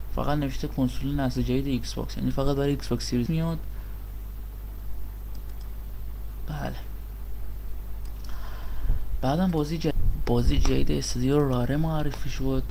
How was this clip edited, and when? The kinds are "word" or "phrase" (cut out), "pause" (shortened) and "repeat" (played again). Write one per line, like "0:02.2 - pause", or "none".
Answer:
0:03.3 - word